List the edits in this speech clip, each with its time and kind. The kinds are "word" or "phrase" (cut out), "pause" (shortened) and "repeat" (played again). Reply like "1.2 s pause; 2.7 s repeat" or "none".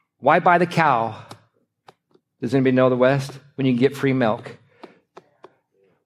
none